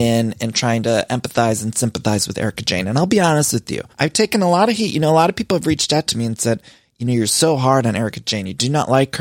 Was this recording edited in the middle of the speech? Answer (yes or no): yes